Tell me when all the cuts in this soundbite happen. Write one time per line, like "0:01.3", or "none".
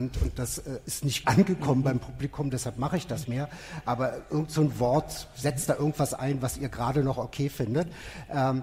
0:01.2
0:03.2

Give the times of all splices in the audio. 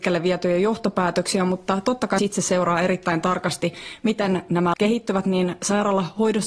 0:02.2
0:04.7

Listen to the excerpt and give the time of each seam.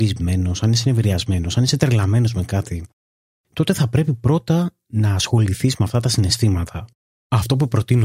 none

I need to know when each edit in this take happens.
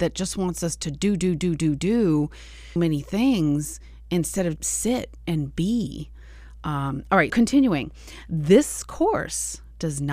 0:02.8
0:04.6
0:07.3

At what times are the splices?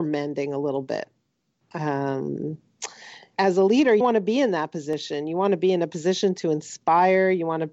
0:03.3
0:04.0

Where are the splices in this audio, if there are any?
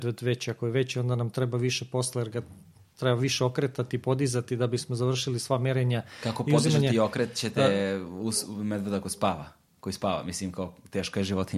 none

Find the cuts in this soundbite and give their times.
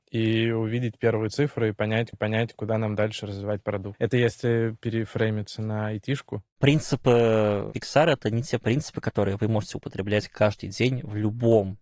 0:02.1

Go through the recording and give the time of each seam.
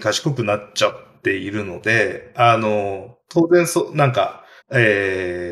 0:04.6

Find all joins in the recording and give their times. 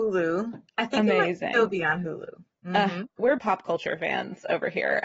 0:03.4

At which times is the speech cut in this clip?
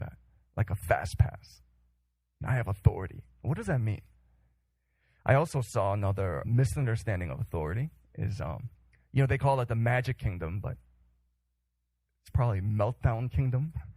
0:06.4

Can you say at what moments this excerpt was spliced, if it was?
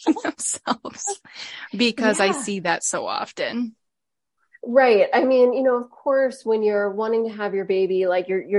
none

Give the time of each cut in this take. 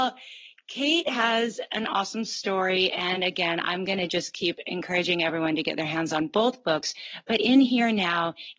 none

